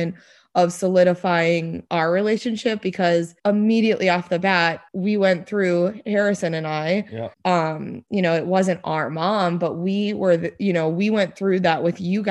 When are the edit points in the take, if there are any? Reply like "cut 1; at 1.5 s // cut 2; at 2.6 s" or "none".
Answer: cut 1; at 3.4 s // cut 2; at 4.9 s // cut 3; at 7.3 s